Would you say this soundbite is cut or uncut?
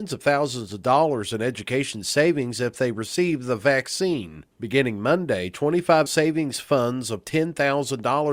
cut